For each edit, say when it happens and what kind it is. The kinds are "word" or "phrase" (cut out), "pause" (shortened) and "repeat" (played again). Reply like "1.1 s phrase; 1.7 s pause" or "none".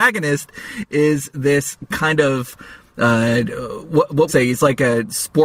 4.3 s phrase